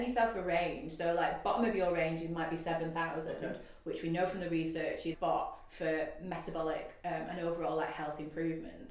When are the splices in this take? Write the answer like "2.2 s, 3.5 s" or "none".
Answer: 5.1 s